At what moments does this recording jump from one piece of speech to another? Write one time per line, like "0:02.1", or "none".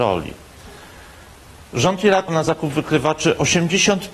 0:02.3